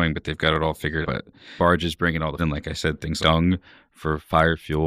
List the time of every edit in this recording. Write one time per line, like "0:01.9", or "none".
0:01.0
0:01.6
0:02.4
0:03.2